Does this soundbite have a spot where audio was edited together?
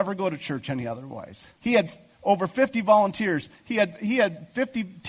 yes; 1 cut; at 1.5 s

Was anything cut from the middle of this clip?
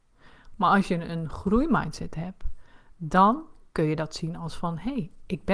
no; 0 cuts

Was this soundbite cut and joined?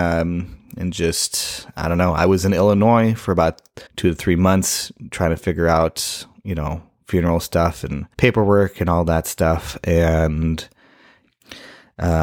yes; 2 cuts; at 3.9 s, 8.1 s

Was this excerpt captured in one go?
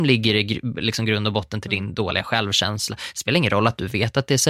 yes; 0 cuts

